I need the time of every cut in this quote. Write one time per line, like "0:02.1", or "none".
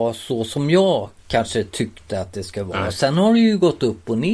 0:01.2